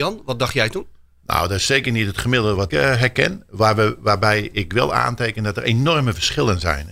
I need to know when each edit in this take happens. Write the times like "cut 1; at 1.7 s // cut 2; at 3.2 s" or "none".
cut 1; at 2.7 s

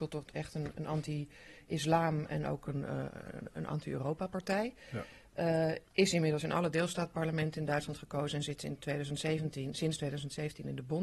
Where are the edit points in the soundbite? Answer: none

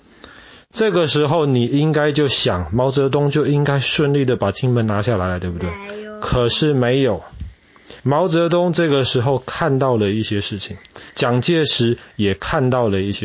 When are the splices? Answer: cut 1; at 8.0 s // cut 2; at 11.1 s

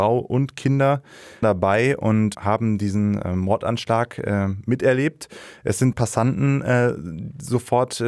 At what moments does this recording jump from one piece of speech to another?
cut 1; at 1.4 s // cut 2; at 2.3 s // cut 3; at 5.9 s

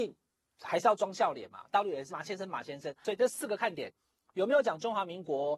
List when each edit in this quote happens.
cut 1; at 2.1 s

